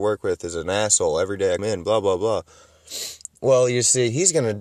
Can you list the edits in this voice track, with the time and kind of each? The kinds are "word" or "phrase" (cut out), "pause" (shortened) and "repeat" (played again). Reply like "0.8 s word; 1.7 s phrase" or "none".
1.6 s word